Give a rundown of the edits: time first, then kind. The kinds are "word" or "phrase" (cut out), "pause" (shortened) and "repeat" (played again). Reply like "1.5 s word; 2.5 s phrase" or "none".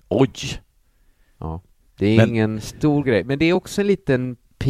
none